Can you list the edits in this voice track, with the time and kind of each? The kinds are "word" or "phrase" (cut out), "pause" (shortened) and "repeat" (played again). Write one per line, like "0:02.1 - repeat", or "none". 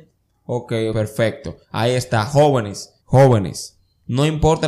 0:00.9 - word
0:01.6 - pause
0:03.0 - pause